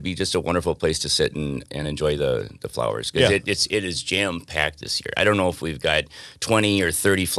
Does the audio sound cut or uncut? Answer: uncut